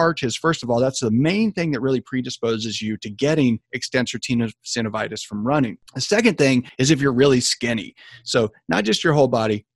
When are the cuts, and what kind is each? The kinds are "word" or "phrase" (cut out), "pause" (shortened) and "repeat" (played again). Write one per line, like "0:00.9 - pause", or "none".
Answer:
none